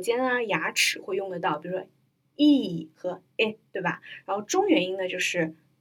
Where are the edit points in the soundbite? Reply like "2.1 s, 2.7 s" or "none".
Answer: none